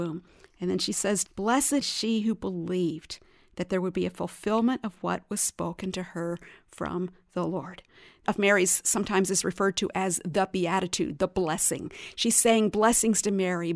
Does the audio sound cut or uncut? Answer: cut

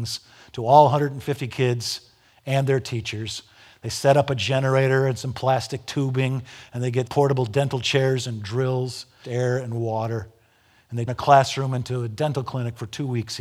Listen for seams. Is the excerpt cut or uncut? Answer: cut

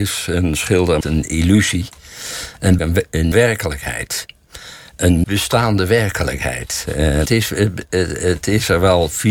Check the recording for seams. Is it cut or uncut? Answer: cut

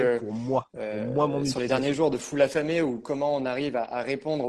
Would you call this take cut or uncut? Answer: uncut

